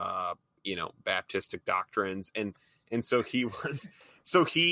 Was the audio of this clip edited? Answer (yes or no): no